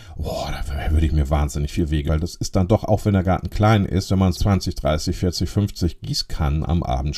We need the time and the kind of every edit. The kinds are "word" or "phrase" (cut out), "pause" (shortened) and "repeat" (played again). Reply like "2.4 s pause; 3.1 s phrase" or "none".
2.1 s word; 4.3 s word